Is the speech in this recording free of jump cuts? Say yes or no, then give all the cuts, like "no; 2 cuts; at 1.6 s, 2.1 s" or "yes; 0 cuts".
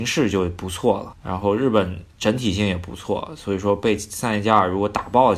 no; 1 cut; at 2.1 s